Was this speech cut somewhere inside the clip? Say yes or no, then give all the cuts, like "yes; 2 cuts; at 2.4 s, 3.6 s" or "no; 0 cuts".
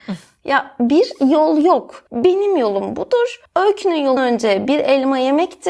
yes; 3 cuts; at 2.1 s, 3.4 s, 4.2 s